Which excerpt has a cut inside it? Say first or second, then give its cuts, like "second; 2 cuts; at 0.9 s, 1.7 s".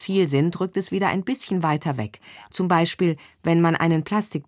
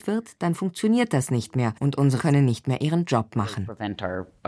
second; 2 cuts; at 1.8 s, 2.2 s